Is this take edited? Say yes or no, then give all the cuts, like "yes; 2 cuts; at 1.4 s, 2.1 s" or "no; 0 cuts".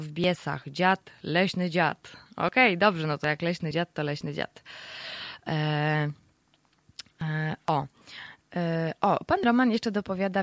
no; 0 cuts